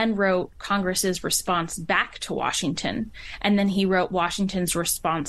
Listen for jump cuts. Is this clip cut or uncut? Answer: uncut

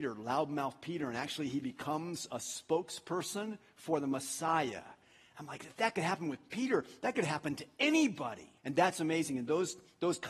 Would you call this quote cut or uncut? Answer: cut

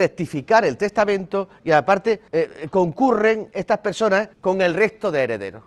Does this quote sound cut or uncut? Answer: cut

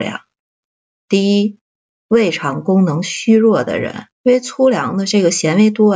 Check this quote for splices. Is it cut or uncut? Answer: cut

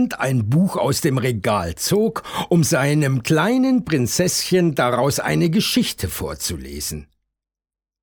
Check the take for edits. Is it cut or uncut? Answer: uncut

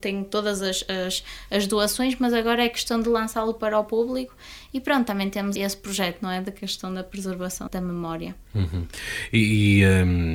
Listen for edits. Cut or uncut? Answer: cut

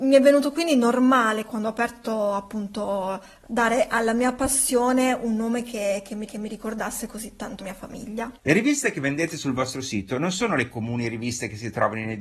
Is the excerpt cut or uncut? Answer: cut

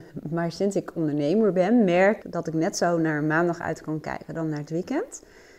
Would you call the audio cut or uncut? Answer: cut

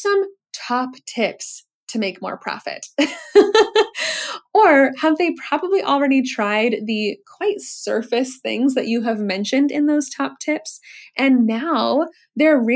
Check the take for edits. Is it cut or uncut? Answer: uncut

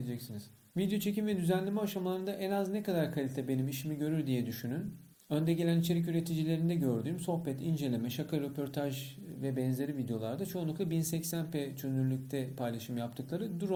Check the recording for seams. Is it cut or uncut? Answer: uncut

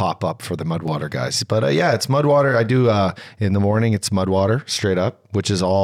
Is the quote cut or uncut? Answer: uncut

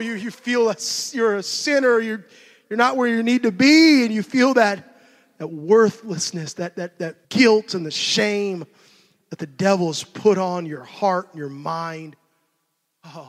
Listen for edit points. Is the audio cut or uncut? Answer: cut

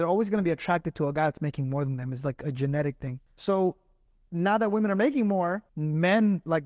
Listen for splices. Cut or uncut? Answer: cut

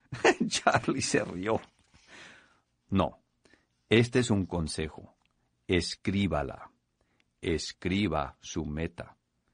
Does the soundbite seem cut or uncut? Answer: uncut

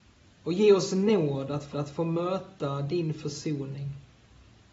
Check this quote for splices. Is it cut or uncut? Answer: cut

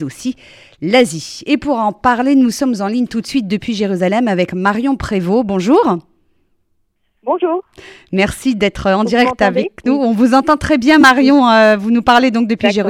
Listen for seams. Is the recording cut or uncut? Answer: uncut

